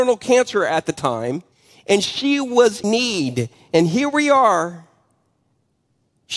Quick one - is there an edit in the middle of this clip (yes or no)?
yes